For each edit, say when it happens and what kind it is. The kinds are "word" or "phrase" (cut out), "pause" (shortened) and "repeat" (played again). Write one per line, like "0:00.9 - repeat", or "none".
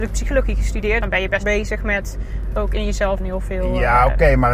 0:01.0 - word
0:01.4 - word
0:03.2 - word